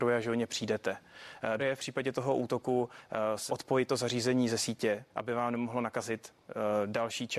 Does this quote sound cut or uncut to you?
cut